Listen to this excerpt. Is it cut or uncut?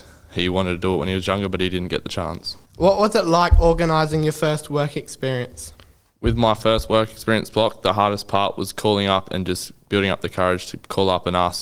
cut